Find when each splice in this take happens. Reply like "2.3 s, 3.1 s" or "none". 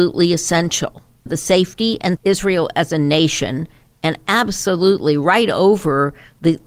1.3 s, 2.2 s